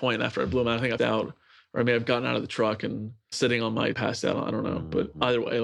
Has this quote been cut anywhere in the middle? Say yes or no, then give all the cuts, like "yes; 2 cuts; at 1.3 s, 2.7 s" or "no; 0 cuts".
yes; 3 cuts; at 1.0 s, 3.3 s, 3.9 s